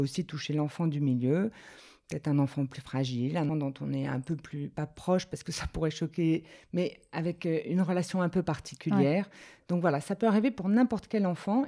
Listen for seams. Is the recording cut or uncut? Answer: cut